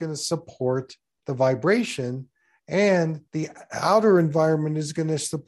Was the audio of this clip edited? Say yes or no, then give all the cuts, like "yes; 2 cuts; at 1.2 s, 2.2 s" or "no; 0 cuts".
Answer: yes; 1 cut; at 3.3 s